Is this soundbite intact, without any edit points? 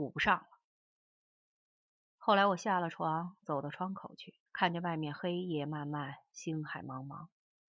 no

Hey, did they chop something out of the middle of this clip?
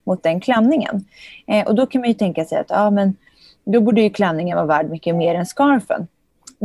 no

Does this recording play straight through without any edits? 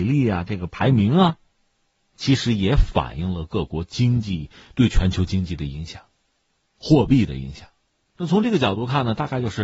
yes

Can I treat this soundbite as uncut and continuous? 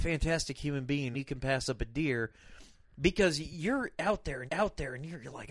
no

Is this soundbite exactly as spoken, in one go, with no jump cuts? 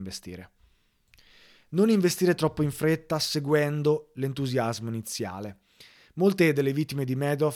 yes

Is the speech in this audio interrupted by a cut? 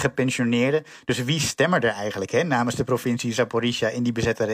no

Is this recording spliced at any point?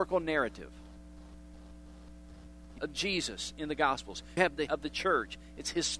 yes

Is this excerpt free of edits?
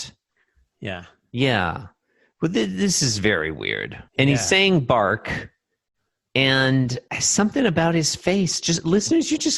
no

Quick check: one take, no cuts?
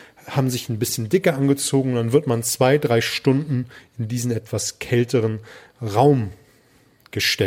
yes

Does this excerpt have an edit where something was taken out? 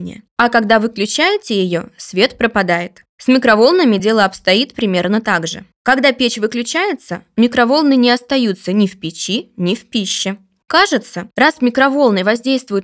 no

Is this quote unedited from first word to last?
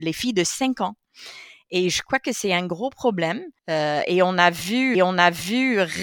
no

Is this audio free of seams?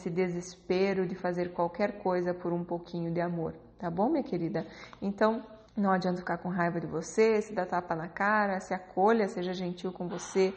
no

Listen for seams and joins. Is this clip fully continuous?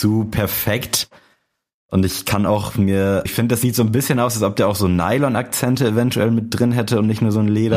no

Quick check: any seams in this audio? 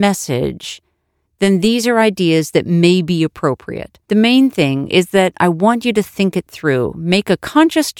yes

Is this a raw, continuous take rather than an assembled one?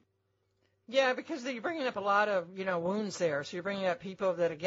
yes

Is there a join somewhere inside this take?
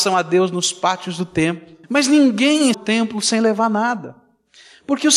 yes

